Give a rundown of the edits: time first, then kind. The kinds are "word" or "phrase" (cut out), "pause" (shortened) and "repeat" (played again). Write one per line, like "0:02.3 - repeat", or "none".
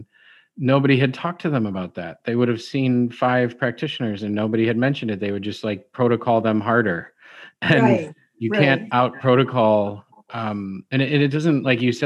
none